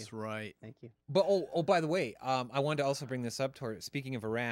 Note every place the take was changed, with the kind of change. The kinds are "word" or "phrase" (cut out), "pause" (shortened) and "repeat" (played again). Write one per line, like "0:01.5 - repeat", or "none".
none